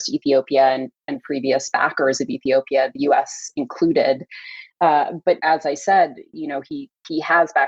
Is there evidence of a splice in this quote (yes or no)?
yes